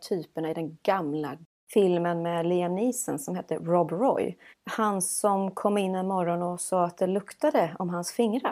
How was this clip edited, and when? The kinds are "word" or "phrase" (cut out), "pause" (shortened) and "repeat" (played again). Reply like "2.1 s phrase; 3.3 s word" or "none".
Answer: 4.5 s pause